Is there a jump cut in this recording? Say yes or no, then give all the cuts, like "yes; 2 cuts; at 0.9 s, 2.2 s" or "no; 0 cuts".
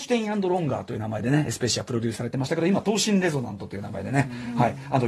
no; 0 cuts